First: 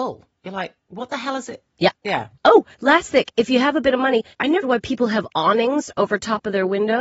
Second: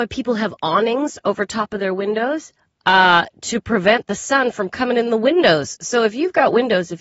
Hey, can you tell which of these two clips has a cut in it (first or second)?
first